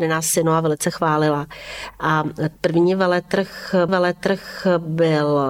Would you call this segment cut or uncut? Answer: cut